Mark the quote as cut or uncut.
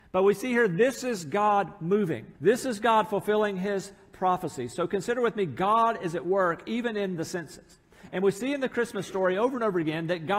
cut